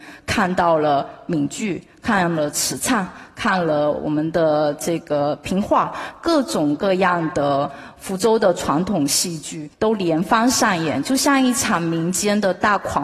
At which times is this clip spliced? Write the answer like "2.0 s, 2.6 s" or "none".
9.7 s